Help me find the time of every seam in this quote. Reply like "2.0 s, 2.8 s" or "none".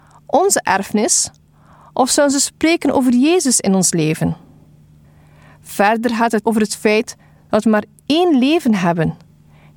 6.4 s